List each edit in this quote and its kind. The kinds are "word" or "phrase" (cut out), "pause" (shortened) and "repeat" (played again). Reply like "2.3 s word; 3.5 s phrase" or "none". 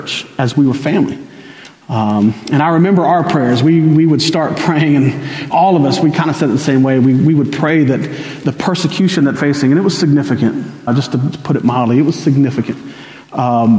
5.5 s word; 9.4 s word; 10.9 s word; 11.3 s word